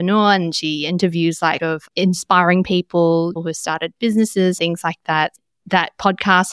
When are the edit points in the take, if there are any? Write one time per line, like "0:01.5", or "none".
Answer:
0:01.6
0:03.4
0:04.6